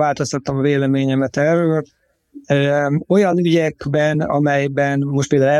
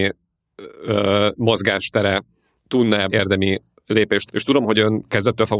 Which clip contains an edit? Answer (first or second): second